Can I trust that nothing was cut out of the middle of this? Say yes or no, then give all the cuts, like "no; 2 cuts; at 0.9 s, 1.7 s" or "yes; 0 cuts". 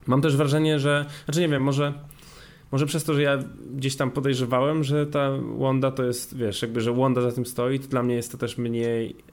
yes; 0 cuts